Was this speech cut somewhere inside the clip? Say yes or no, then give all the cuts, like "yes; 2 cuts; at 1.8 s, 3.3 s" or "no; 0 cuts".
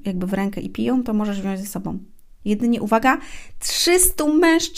no; 0 cuts